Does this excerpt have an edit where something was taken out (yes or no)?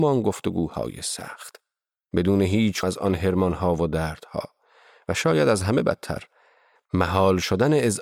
yes